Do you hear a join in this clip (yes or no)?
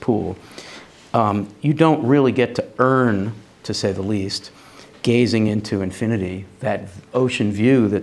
no